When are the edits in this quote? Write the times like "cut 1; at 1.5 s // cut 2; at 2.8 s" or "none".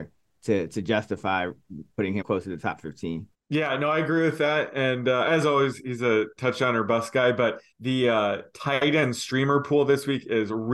cut 1; at 2.2 s // cut 2; at 3.3 s // cut 3; at 7.7 s